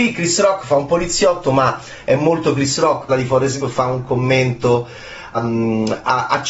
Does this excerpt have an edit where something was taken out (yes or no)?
yes